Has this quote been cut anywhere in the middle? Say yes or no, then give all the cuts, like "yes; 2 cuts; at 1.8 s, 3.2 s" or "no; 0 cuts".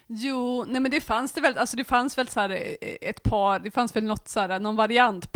no; 0 cuts